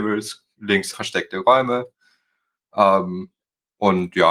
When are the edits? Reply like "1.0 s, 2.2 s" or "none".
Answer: 0.9 s